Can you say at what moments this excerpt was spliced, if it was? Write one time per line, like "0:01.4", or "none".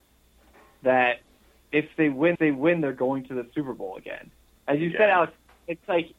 0:02.3